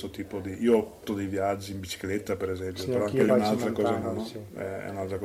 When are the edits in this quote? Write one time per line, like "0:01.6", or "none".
0:01.1
0:03.3
0:04.0